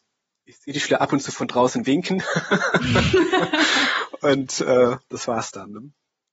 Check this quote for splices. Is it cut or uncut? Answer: uncut